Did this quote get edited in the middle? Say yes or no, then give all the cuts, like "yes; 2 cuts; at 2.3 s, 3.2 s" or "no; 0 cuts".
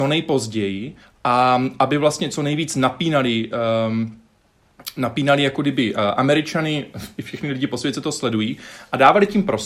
yes; 1 cut; at 1.0 s